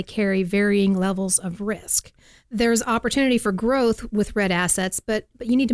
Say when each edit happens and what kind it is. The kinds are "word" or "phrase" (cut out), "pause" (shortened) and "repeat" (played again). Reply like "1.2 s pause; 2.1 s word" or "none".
none

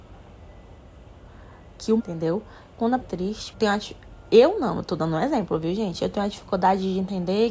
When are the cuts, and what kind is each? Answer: 2.0 s word; 3.0 s phrase; 3.5 s phrase

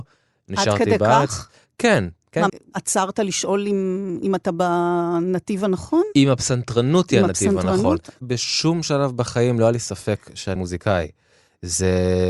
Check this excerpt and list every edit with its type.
2.5 s word; 10.6 s word

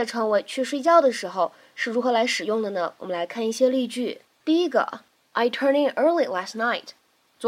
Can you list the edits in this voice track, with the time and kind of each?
none

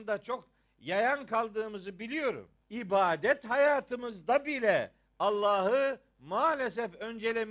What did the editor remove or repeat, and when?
2.6 s pause

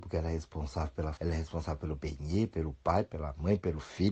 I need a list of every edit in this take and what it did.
1.2 s word

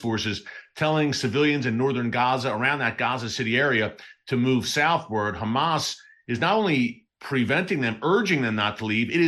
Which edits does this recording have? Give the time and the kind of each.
none

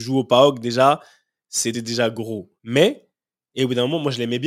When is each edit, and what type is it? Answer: 1.7 s word; 2.6 s pause

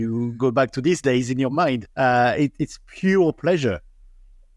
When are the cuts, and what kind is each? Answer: 1.9 s pause

